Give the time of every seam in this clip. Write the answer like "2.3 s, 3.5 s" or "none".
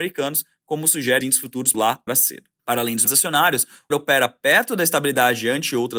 1.2 s, 1.7 s, 2.1 s, 3.1 s, 3.9 s